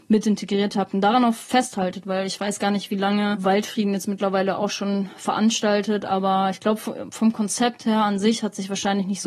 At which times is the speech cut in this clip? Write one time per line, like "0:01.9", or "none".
none